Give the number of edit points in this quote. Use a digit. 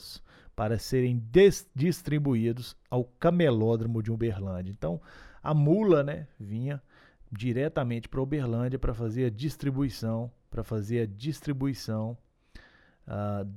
1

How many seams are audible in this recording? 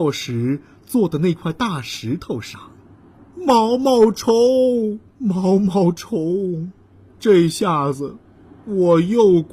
2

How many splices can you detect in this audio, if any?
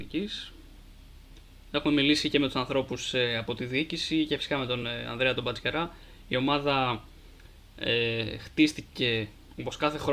0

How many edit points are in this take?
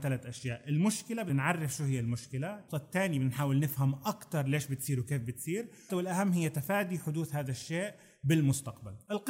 3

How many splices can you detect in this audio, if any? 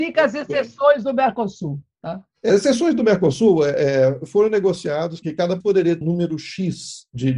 4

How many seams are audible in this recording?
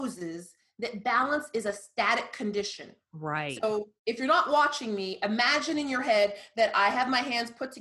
0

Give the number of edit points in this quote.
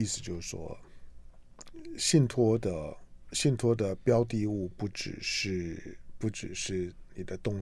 0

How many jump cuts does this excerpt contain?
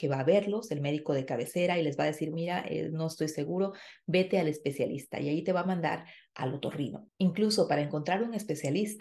1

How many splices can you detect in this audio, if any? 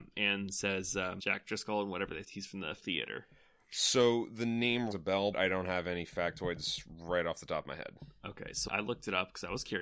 6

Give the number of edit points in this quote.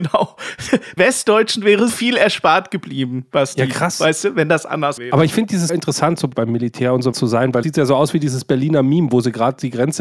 7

